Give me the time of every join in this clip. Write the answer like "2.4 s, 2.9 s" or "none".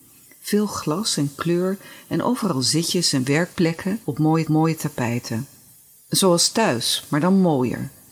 4.5 s